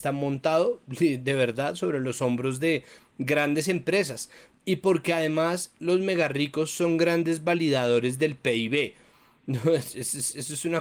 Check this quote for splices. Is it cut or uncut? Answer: uncut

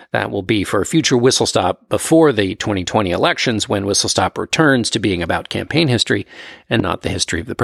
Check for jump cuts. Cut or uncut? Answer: uncut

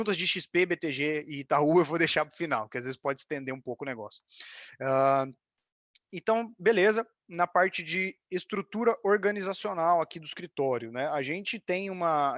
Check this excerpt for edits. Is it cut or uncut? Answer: uncut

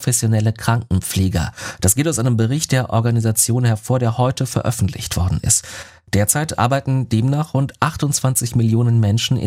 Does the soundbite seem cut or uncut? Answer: uncut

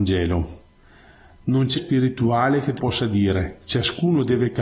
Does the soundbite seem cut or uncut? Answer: cut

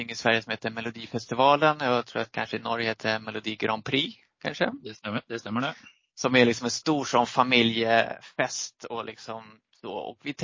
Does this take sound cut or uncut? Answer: uncut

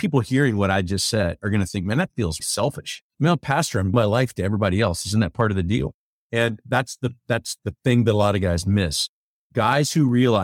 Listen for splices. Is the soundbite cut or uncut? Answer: cut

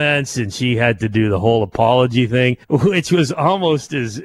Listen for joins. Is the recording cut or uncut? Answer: cut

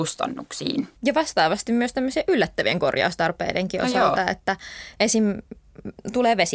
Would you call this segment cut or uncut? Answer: cut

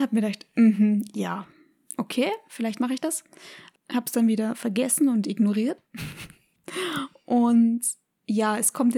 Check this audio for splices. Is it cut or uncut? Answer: uncut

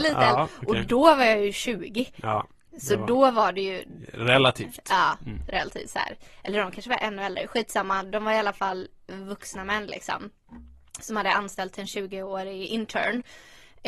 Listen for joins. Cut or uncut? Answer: uncut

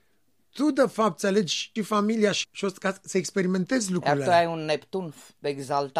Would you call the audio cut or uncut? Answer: cut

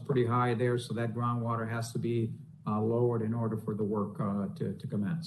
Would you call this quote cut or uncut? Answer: uncut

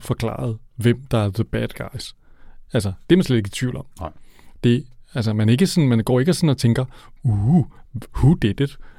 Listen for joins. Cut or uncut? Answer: uncut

